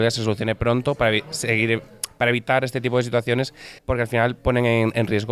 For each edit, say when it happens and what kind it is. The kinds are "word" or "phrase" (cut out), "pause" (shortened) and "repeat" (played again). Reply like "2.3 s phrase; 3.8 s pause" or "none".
3.8 s pause